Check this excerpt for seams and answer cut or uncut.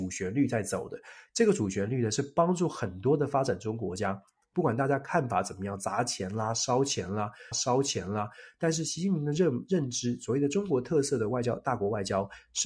cut